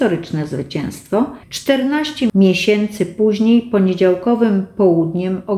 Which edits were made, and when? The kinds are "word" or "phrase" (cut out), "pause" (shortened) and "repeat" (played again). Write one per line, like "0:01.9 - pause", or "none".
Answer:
0:01.4 - pause